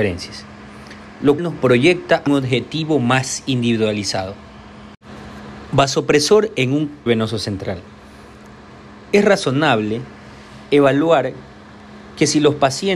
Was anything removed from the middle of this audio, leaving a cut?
yes; 3 cuts; at 1.4 s, 2.3 s, 7.1 s

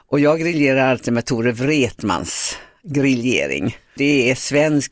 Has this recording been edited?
no; 0 cuts

